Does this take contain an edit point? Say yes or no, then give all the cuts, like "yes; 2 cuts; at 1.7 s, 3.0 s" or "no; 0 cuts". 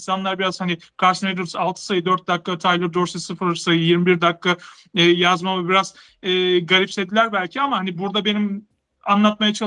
no; 0 cuts